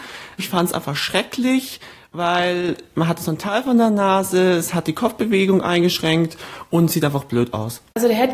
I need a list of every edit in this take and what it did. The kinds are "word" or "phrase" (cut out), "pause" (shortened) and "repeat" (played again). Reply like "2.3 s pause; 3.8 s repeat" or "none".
none

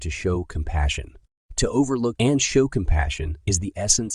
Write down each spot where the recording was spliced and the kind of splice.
2.1 s word

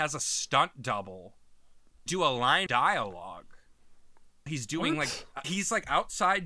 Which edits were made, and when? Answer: 2.1 s word; 2.7 s word; 4.5 s word; 5.4 s word

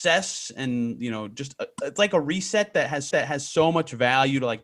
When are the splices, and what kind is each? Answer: 3.1 s repeat

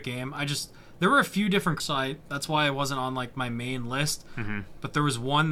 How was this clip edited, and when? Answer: 1.8 s word

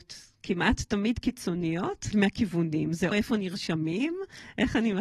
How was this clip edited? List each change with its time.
2.1 s word; 3.1 s word

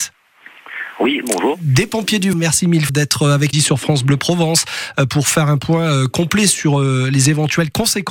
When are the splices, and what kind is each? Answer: 2.3 s word; 2.9 s word; 3.5 s phrase

